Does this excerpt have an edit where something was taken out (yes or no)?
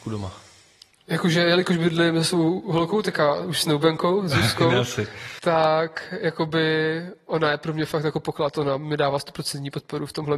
no